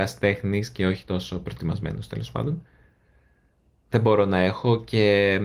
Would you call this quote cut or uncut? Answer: uncut